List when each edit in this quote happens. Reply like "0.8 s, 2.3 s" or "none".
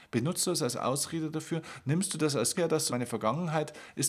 2.5 s, 2.9 s